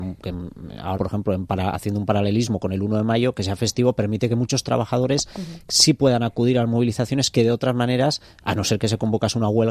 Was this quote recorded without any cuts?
no; 1 cut; at 1.0 s

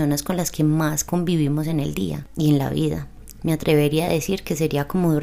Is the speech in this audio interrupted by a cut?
no; 0 cuts

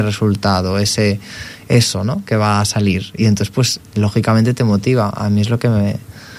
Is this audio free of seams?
yes; 0 cuts

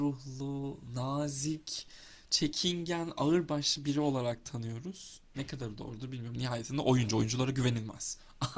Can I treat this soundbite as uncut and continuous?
yes; 0 cuts

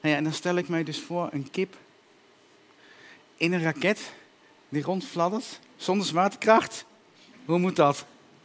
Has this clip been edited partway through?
no; 0 cuts

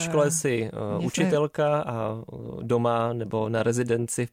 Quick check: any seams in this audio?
no; 0 cuts

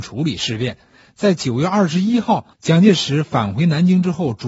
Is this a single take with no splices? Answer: no; 1 cut; at 2.5 s

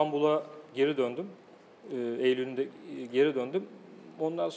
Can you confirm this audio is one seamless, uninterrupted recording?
yes; 0 cuts

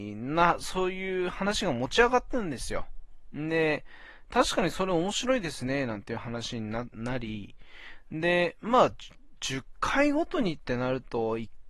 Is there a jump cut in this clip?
no; 0 cuts

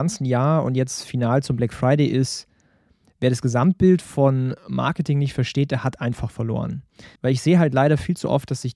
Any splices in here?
yes; 1 cut; at 7.2 s

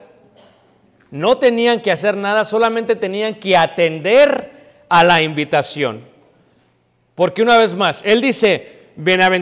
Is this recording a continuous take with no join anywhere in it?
yes; 0 cuts

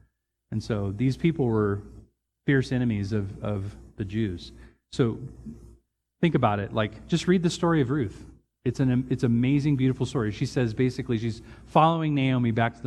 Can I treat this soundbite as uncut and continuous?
yes; 0 cuts

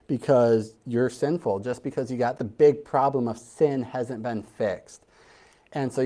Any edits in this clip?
yes; 1 cut; at 2.4 s

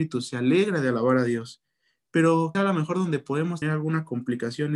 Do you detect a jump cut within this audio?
yes; 2 cuts; at 2.5 s, 3.6 s

